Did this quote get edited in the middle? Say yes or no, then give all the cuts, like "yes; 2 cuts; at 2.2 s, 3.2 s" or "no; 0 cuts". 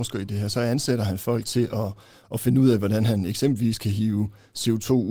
no; 0 cuts